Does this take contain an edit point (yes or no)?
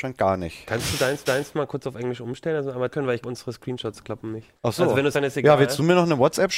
yes